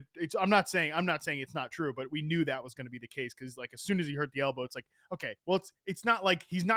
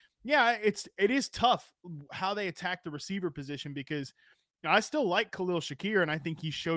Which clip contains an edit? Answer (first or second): first